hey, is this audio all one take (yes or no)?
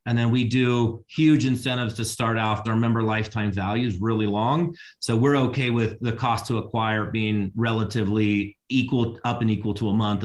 no